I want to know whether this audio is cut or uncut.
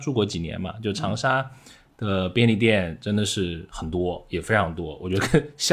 uncut